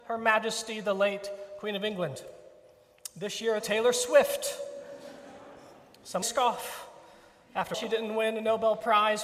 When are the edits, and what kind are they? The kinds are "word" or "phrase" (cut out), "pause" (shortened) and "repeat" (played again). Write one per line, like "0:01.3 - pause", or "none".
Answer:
0:03.6 - phrase
0:06.2 - phrase
0:07.7 - word